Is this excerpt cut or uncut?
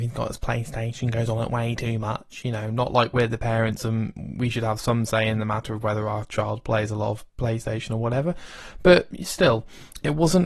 uncut